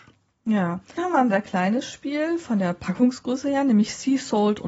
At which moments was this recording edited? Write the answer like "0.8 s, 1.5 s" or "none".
1.0 s